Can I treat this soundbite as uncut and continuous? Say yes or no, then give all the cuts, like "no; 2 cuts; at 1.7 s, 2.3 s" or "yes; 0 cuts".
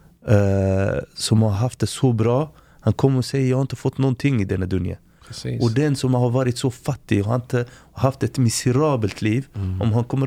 yes; 0 cuts